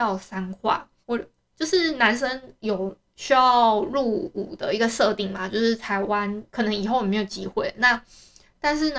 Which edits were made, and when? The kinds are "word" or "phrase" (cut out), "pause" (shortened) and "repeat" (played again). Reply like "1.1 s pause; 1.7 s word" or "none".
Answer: 1.0 s pause; 6.5 s pause